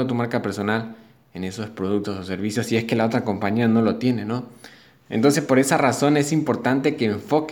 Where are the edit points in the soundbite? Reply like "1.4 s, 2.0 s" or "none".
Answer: none

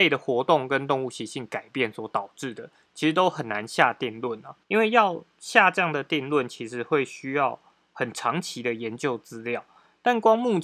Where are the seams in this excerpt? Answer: 4.6 s

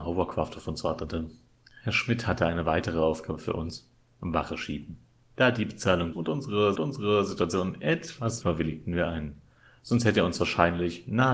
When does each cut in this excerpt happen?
6.1 s, 6.8 s, 8.4 s

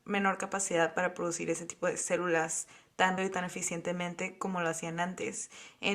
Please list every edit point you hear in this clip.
3.2 s

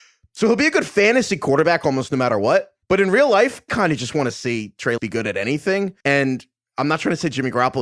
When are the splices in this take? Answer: 2.8 s, 3.7 s, 5.0 s, 6.0 s

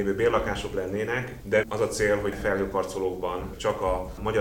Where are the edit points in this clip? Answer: 1.6 s, 2.3 s

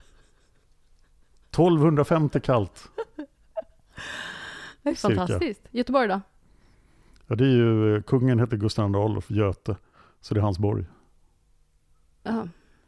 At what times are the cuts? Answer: none

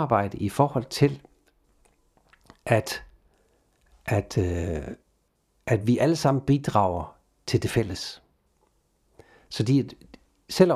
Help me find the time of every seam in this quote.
none

